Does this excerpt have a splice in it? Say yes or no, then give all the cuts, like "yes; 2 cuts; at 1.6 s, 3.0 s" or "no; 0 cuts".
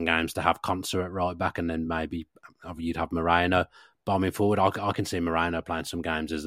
no; 0 cuts